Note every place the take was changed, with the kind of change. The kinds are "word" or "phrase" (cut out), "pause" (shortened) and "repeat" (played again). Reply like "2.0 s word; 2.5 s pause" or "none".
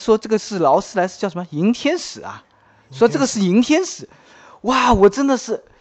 none